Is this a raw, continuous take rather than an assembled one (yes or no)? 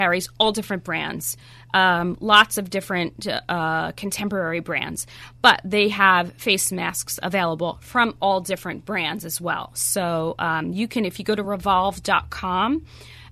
yes